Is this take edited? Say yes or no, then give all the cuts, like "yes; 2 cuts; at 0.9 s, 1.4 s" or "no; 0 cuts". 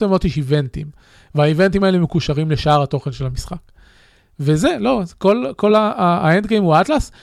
no; 0 cuts